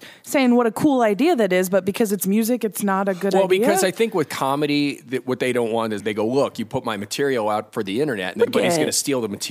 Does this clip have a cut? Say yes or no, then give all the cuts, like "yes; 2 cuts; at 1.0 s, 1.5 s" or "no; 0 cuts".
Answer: yes; 2 cuts; at 6.0 s, 8.5 s